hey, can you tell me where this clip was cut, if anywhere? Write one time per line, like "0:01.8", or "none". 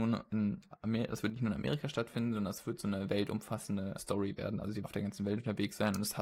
0:04.0
0:04.8